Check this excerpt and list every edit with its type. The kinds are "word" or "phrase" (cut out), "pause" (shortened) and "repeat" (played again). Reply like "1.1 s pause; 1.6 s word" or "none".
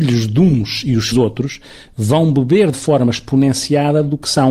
1.1 s word; 2.7 s word